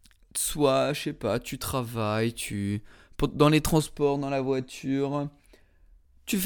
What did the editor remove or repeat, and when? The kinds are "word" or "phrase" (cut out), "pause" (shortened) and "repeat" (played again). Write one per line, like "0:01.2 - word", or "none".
none